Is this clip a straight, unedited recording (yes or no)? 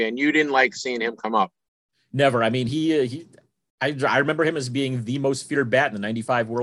yes